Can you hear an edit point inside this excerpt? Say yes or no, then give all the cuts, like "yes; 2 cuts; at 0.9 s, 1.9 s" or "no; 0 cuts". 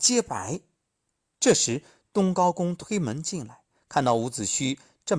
no; 0 cuts